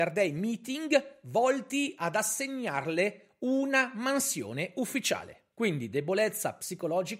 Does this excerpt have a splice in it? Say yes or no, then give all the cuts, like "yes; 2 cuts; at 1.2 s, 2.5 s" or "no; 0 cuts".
yes; 1 cut; at 5.5 s